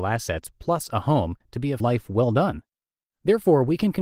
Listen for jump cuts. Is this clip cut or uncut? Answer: cut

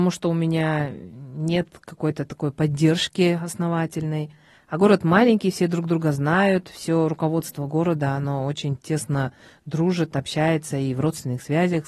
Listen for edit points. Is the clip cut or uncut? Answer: uncut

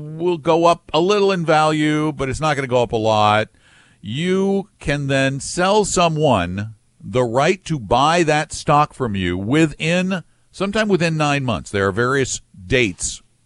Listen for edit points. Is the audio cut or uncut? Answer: uncut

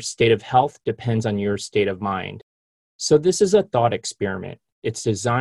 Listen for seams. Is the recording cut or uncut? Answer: uncut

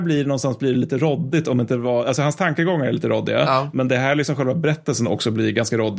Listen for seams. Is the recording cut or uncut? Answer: uncut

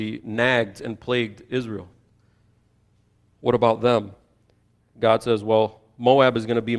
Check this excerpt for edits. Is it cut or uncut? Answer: uncut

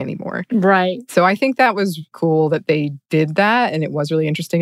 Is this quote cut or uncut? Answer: cut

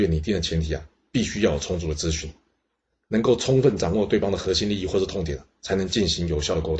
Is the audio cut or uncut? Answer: uncut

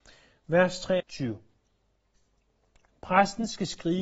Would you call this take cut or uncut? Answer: cut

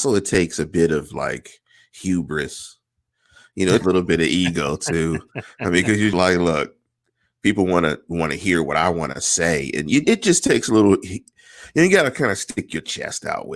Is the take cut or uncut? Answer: cut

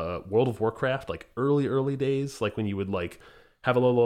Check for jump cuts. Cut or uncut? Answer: uncut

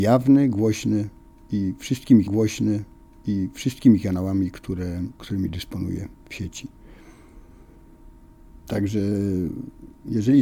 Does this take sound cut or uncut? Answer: cut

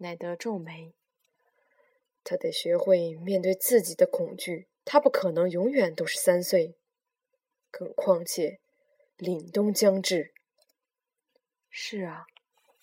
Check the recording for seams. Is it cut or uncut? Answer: cut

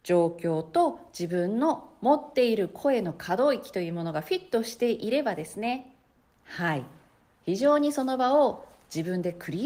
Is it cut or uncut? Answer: uncut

